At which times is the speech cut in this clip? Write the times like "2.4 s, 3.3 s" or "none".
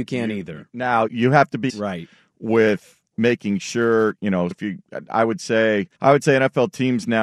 1.1 s, 1.7 s, 3.1 s, 4.5 s, 5.9 s